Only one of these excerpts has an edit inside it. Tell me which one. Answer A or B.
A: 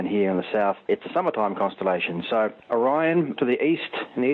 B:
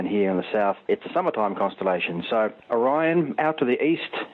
A